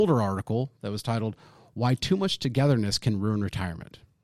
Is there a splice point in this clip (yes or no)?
no